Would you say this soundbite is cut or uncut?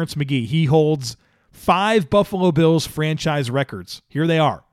uncut